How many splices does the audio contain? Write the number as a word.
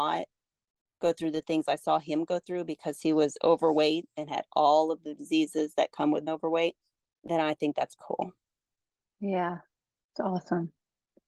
three